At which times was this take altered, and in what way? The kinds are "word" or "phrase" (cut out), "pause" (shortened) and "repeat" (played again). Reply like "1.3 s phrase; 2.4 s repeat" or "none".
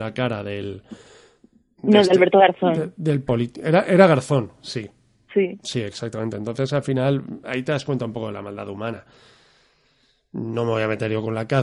none